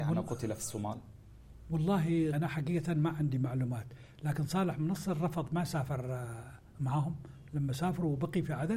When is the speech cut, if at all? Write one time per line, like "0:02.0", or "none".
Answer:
0:02.3